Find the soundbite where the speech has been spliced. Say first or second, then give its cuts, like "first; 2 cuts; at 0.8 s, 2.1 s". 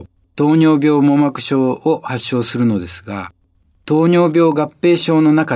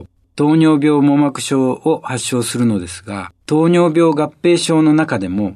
second; 1 cut; at 3.4 s